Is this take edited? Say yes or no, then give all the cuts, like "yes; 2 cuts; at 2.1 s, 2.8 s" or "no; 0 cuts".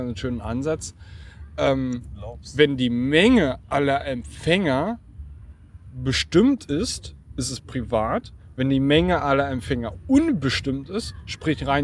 no; 0 cuts